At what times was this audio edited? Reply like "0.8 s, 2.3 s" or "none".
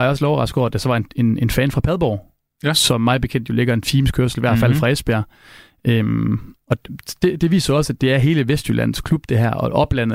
none